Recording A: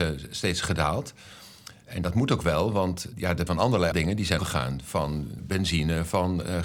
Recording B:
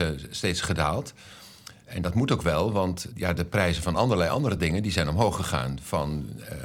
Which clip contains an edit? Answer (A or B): A